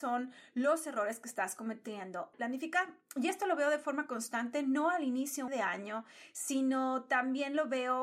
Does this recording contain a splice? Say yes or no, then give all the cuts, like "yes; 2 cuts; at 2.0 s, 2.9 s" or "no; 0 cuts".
yes; 2 cuts; at 2.3 s, 5.5 s